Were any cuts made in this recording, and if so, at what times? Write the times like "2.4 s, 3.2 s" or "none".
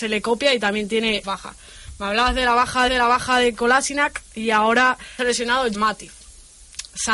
1.2 s, 2.9 s, 5.2 s, 5.7 s